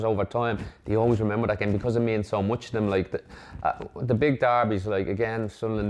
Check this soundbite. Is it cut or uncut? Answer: uncut